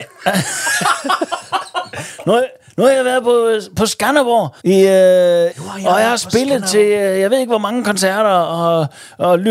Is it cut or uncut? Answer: cut